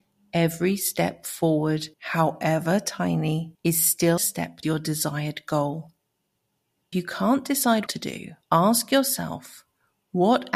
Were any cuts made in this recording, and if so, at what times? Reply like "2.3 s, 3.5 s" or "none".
1.9 s, 3.5 s, 4.2 s, 4.6 s, 6.9 s, 7.9 s, 8.4 s